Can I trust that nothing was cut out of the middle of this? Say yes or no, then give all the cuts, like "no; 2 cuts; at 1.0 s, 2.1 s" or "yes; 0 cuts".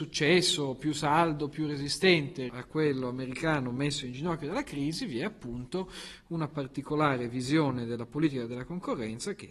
no; 1 cut; at 2.5 s